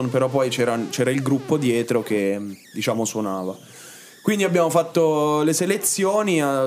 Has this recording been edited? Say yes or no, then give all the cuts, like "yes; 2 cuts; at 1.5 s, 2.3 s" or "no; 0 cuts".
no; 0 cuts